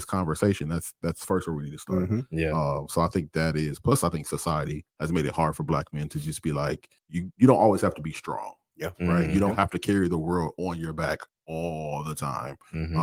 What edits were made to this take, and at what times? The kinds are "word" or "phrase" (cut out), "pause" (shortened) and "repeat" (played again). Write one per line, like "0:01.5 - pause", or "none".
0:04.9 - pause
0:07.0 - pause
0:11.3 - pause